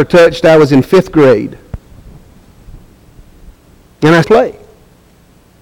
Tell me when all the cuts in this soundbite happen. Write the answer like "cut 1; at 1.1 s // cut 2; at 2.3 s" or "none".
cut 1; at 4.2 s